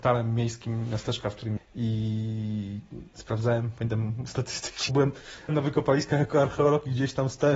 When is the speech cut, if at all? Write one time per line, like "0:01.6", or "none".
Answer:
0:01.6
0:04.9
0:05.5